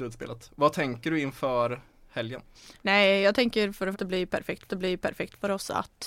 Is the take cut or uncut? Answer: cut